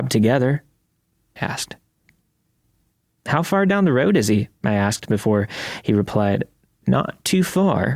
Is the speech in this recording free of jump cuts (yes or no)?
no